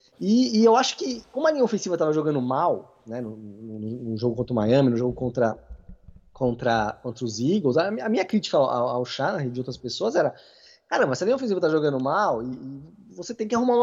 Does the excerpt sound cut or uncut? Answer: uncut